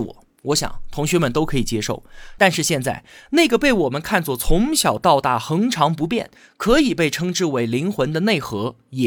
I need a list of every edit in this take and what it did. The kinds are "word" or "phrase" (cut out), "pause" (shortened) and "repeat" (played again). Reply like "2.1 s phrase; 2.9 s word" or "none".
none